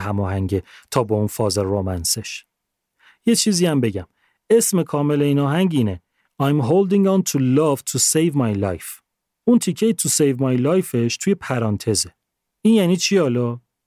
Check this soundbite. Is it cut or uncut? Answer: uncut